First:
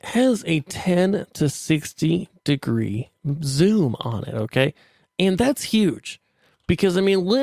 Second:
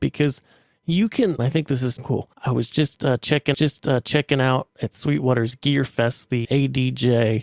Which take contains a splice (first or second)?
second